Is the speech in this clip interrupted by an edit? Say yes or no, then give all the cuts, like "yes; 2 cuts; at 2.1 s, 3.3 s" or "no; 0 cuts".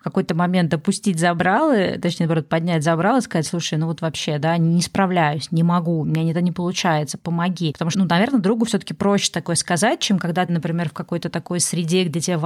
yes; 2 cuts; at 7.9 s, 10.5 s